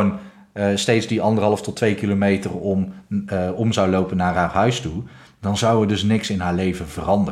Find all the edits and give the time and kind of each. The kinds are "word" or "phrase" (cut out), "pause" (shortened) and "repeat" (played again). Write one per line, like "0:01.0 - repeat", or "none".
none